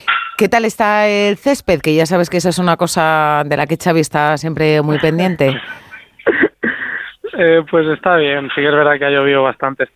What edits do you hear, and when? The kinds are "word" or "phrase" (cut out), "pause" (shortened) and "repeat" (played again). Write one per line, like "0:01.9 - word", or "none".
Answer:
none